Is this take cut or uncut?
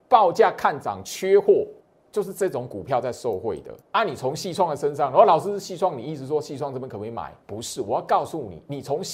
cut